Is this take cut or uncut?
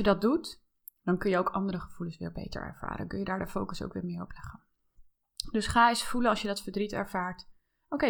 uncut